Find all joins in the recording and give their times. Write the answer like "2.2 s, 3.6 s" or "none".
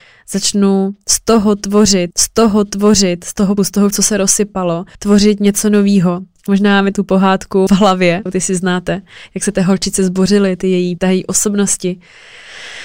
2.1 s, 3.6 s, 3.9 s, 4.9 s, 6.9 s, 7.7 s, 8.3 s, 11.0 s